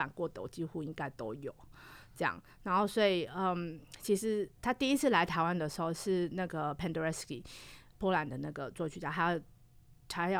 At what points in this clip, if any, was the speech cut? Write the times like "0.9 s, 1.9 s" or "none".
4.6 s, 7.9 s